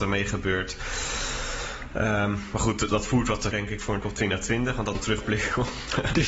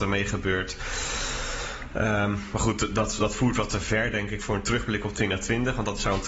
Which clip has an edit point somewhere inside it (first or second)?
first